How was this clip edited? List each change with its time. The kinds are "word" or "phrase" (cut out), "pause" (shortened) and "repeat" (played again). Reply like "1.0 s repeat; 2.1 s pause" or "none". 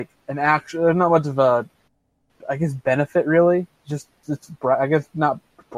4.2 s word

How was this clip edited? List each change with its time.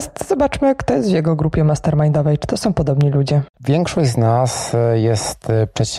3.5 s pause

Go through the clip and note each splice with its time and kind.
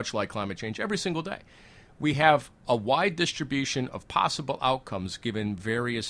none

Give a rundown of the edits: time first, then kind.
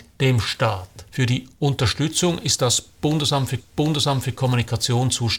1.1 s pause; 3.6 s repeat

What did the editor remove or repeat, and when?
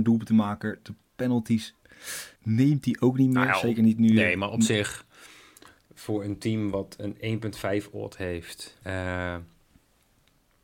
2.4 s pause; 8.8 s pause

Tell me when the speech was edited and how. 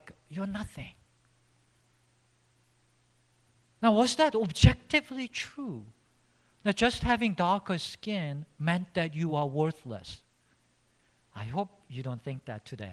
none

